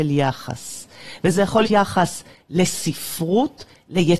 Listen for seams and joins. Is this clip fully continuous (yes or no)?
no